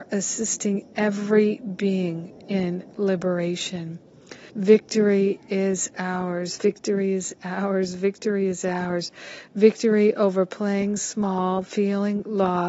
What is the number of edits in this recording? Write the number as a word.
one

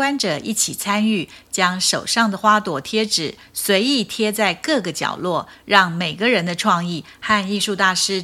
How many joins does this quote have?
zero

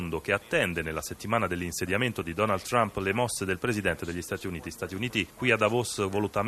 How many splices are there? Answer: zero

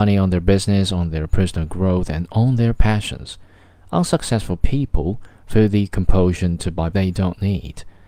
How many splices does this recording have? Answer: one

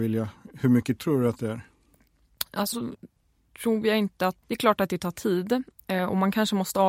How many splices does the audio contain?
three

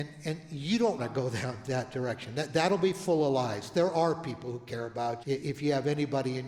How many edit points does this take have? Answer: two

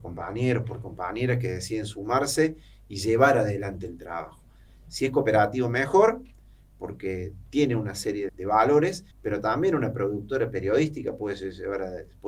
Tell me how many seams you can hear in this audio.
two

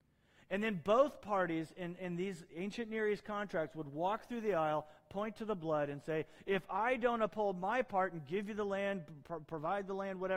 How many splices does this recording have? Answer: zero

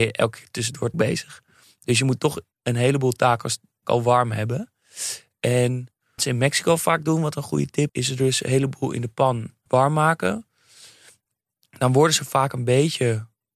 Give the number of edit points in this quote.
six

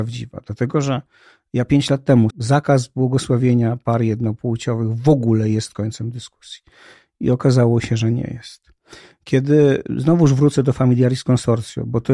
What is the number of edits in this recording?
one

